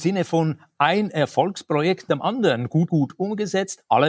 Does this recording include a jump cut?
yes; 2 cuts; at 2.1 s, 2.9 s

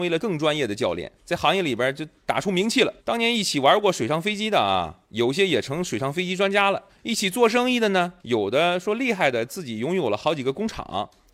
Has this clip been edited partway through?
yes; 6 cuts; at 1.2 s, 2.2 s, 3.0 s, 5.0 s, 6.9 s, 8.2 s

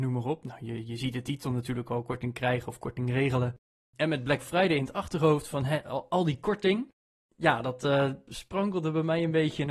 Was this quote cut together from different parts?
no; 0 cuts

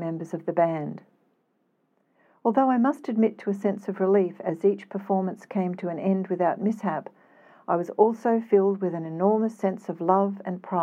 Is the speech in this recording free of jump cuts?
yes; 0 cuts

